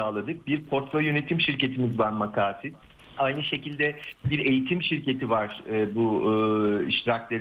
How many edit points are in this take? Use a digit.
1